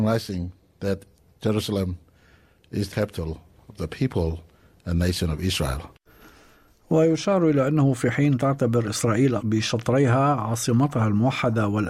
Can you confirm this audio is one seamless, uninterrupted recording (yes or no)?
no